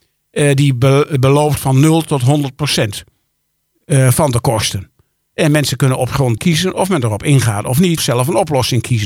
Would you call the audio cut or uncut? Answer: cut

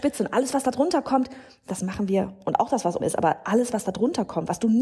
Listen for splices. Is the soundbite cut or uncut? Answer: cut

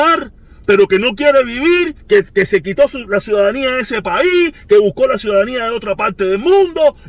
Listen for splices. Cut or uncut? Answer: cut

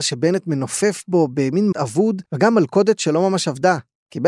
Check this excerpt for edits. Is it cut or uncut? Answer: cut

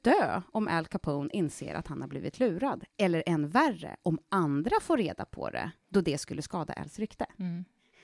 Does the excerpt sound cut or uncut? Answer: uncut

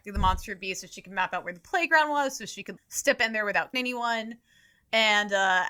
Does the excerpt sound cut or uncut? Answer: cut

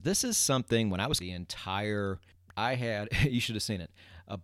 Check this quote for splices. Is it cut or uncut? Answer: cut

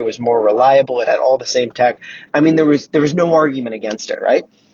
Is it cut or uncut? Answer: uncut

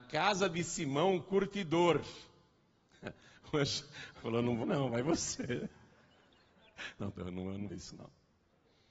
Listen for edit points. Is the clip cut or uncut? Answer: cut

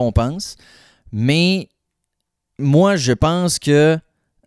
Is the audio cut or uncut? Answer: uncut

